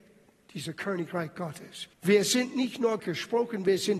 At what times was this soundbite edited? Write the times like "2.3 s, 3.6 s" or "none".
1.9 s, 3.0 s